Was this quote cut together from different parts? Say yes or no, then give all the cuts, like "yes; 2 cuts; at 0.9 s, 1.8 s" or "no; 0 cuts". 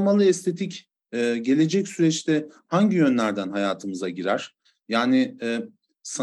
no; 0 cuts